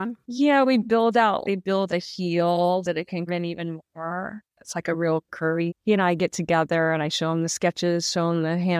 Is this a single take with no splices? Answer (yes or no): no